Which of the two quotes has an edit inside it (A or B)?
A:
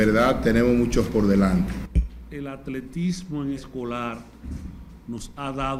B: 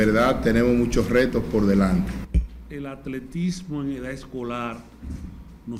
A